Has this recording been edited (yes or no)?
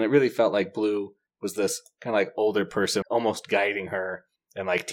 yes